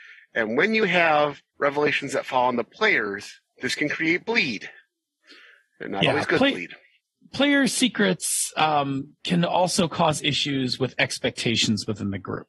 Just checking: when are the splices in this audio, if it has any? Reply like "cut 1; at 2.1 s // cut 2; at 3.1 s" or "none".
cut 1; at 1.5 s

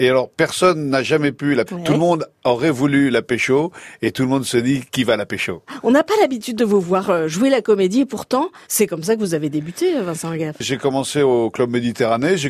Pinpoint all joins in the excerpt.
cut 1; at 1.7 s // cut 2; at 4.9 s // cut 3; at 8.6 s

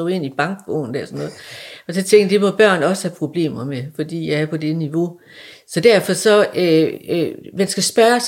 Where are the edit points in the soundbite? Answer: none

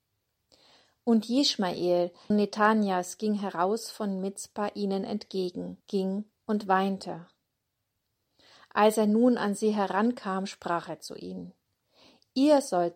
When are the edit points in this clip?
cut 1; at 2.3 s // cut 2; at 5.8 s

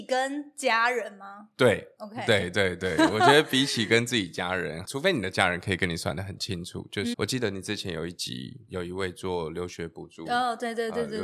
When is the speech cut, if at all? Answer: cut 1; at 7.1 s

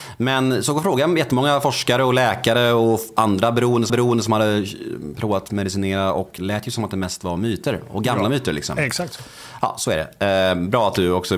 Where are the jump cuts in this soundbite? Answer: cut 1; at 3.9 s // cut 2; at 6.4 s

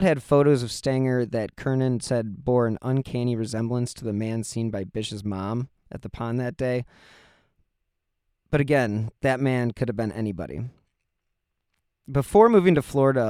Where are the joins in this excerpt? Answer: cut 1; at 9.2 s

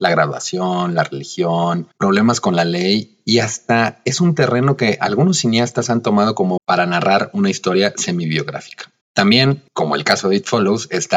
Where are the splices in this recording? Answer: cut 1; at 1.9 s // cut 2; at 6.6 s // cut 3; at 9.0 s

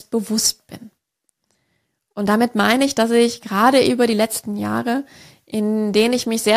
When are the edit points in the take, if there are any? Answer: none

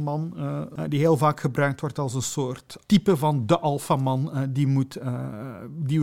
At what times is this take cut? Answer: cut 1; at 2.8 s

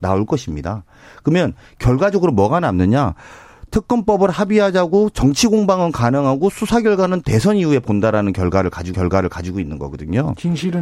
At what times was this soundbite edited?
cut 1; at 8.9 s

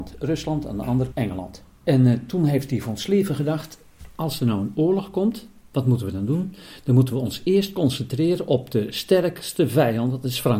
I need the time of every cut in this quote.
cut 1; at 1.1 s

